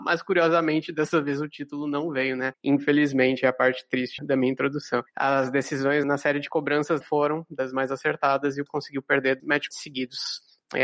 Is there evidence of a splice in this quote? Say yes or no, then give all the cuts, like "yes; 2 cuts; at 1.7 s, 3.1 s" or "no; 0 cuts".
yes; 6 cuts; at 4.2 s, 6.0 s, 7.0 s, 8.7 s, 9.4 s, 9.7 s